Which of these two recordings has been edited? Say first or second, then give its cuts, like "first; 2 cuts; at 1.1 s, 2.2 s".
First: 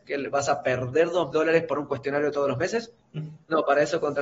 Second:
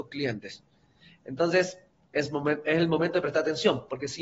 first; 3 cuts; at 1.3 s, 1.8 s, 3.0 s